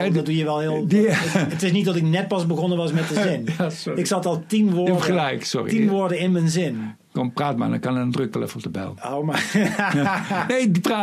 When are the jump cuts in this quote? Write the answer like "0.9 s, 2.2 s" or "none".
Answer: none